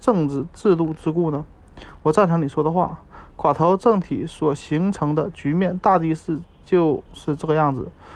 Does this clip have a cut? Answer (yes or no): yes